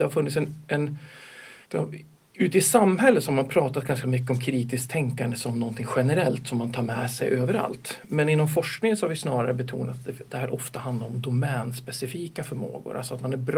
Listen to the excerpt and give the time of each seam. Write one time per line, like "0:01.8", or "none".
0:01.6